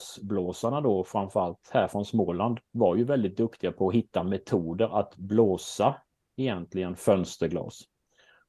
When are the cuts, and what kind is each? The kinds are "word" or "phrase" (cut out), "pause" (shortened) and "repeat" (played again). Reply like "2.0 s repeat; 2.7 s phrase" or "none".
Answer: 2.7 s pause